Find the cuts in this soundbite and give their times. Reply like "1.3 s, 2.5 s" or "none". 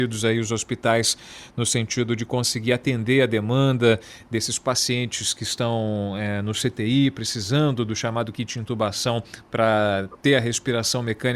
none